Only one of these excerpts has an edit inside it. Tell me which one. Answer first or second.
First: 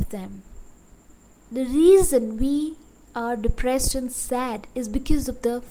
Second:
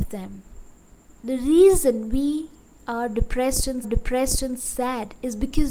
second